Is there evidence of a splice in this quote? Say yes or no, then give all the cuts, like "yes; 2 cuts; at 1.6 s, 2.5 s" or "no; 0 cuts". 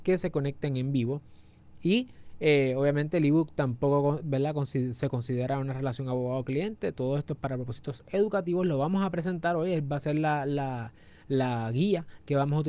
no; 0 cuts